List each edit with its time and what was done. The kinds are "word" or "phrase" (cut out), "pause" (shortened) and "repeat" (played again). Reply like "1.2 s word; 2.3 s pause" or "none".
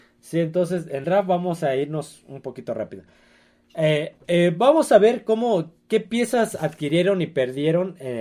1.0 s word; 4.2 s pause